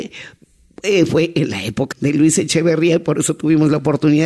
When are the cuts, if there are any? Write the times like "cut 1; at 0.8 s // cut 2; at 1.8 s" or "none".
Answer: cut 1; at 1.9 s